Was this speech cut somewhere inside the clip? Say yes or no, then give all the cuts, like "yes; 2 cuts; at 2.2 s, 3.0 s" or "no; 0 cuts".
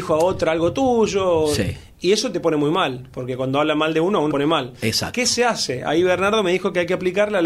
yes; 1 cut; at 4.3 s